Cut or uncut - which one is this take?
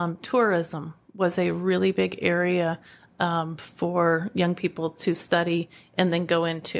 uncut